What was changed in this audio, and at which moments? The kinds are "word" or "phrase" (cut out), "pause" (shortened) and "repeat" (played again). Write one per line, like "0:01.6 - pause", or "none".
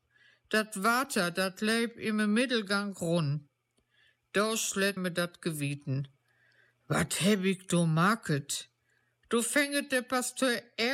0:05.0 - word